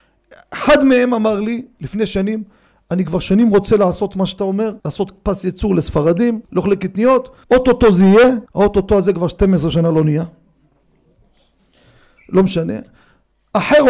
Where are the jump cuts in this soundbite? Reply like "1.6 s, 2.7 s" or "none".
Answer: 4.8 s, 6.4 s, 7.4 s, 8.5 s